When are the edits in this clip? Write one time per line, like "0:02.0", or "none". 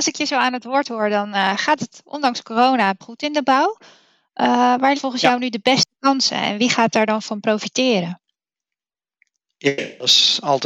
0:03.0
0:05.0